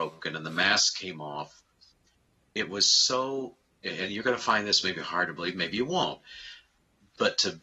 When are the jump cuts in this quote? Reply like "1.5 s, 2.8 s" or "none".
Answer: none